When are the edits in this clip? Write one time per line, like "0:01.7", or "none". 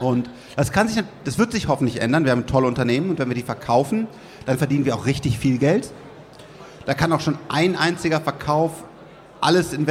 none